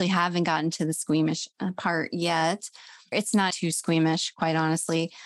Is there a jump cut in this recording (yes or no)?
yes